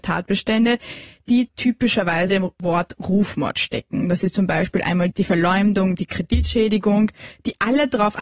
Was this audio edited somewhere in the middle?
yes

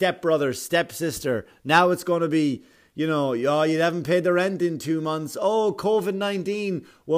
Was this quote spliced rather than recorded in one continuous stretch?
no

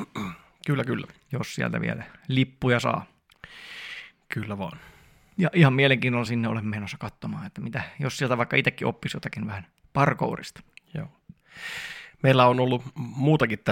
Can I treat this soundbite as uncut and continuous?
yes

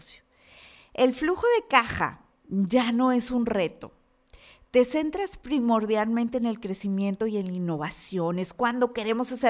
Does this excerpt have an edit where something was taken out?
no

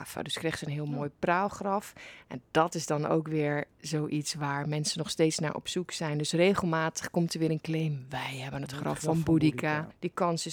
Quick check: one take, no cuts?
yes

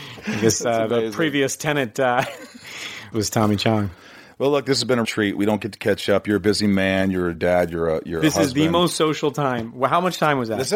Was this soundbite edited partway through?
yes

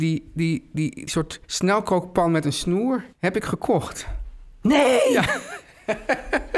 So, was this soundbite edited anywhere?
yes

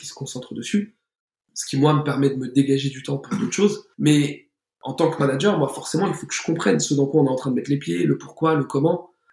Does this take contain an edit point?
no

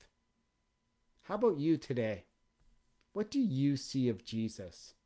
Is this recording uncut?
yes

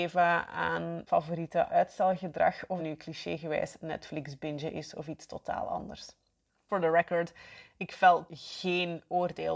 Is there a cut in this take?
yes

